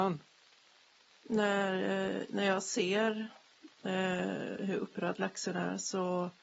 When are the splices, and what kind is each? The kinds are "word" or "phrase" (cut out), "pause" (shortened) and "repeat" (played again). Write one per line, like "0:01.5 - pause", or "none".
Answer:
none